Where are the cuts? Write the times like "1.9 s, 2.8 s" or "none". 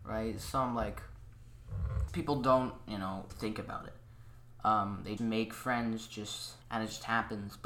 2.1 s, 3.3 s, 5.2 s, 6.6 s